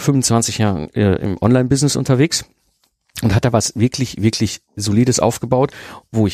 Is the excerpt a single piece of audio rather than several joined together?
yes; 0 cuts

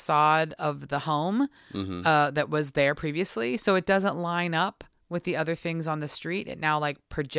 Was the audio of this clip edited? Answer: no; 0 cuts

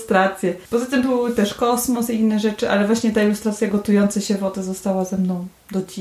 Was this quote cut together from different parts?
no; 0 cuts

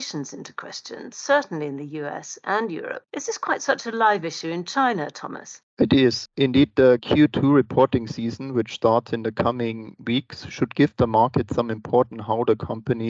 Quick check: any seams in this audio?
yes; 1 cut; at 12.1 s

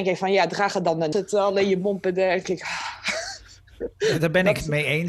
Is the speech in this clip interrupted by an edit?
yes; 2 cuts; at 1.1 s, 2.4 s

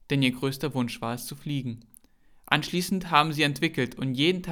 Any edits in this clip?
no; 0 cuts

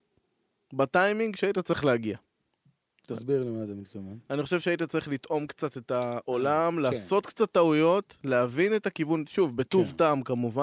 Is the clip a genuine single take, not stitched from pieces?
yes; 0 cuts

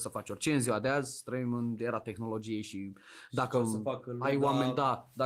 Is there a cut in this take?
no; 0 cuts

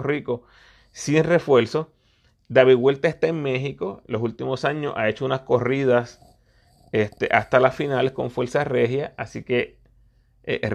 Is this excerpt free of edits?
yes; 0 cuts

